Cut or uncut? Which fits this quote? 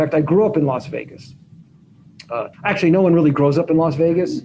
cut